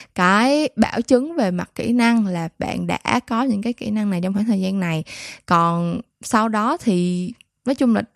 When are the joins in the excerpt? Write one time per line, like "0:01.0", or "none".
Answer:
none